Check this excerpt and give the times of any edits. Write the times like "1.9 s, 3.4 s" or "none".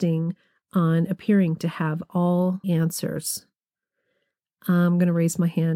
2.6 s